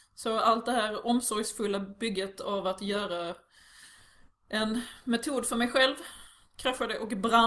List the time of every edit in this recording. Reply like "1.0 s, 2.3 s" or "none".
none